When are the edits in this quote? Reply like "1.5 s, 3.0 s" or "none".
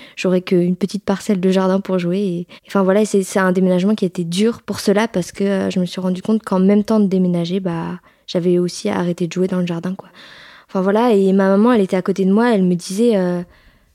2.6 s

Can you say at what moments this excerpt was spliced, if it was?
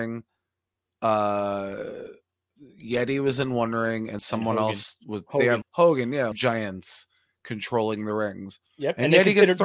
4.2 s, 5.6 s, 6.3 s

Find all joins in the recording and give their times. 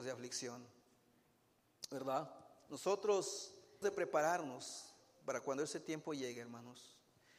3.8 s

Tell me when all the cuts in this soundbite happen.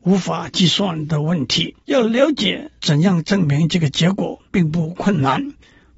1.8 s, 2.8 s, 4.5 s

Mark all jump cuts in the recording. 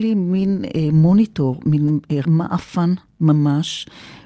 2.2 s

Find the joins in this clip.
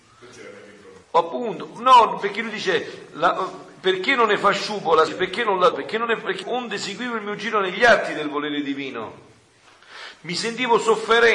1.0 s, 5.1 s, 5.7 s, 6.4 s

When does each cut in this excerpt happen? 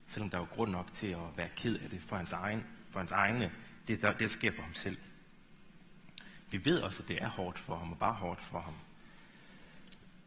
none

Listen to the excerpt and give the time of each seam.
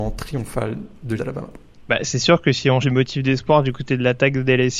1.2 s, 1.8 s, 2.8 s

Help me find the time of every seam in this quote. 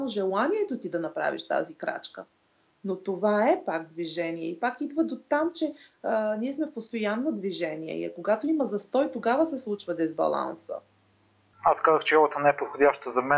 none

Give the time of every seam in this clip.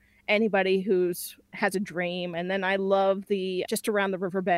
3.7 s

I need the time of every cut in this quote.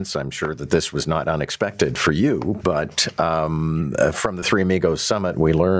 none

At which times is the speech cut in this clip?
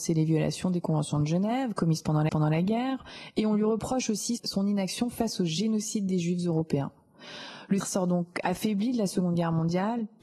2.3 s, 7.8 s

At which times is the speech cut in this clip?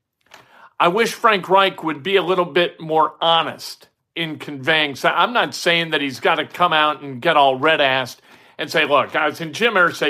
none

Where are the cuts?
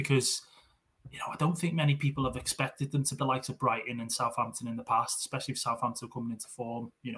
3.2 s

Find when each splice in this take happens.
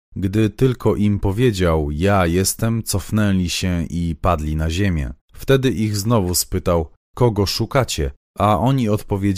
5.2 s

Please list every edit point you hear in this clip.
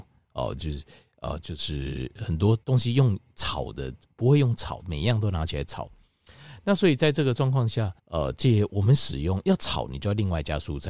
1.4 s, 2.6 s, 8.0 s

